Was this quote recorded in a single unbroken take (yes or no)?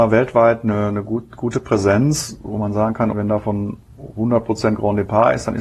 no